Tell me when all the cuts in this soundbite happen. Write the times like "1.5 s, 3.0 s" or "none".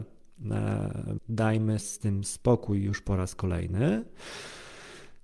1.2 s, 1.8 s